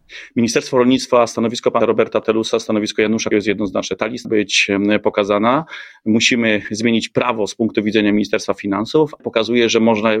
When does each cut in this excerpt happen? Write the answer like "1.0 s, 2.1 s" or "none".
1.8 s, 3.3 s, 4.2 s, 9.2 s